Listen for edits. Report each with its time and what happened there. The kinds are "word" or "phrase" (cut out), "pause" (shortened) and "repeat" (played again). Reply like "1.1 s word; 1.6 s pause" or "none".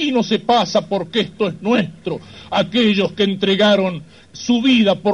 none